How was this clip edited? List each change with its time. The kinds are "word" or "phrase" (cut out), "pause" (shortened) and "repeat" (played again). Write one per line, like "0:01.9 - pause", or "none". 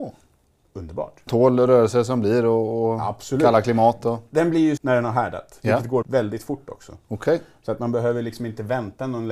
0:01.3 - word
0:04.8 - word
0:06.0 - word